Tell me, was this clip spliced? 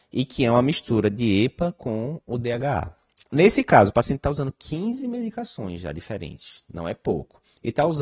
no; 0 cuts

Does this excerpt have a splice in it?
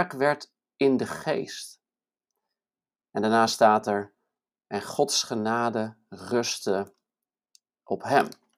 no; 0 cuts

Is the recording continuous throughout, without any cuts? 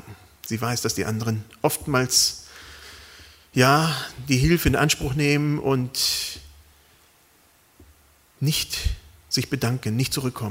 yes; 0 cuts

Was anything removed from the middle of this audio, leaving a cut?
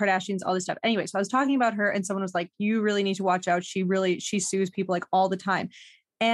no; 0 cuts

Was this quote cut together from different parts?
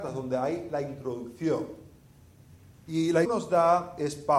yes; 1 cut; at 3.3 s

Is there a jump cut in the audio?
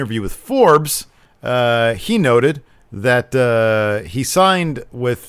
no; 0 cuts

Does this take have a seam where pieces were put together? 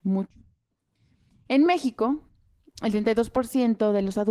no; 0 cuts

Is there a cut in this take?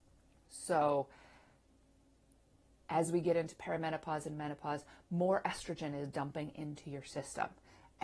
no; 0 cuts

